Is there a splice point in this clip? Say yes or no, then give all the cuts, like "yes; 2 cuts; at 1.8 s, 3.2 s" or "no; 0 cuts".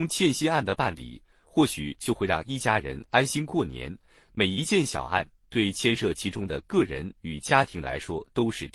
no; 0 cuts